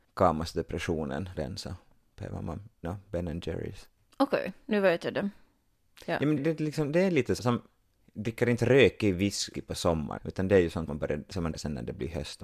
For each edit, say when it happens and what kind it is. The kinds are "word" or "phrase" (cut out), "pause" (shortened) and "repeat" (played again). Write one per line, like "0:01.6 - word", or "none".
0:01.3 - word
0:02.8 - word
0:04.7 - word
0:06.4 - word
0:07.4 - word
0:09.5 - word
0:10.2 - word
0:10.9 - word
0:11.5 - word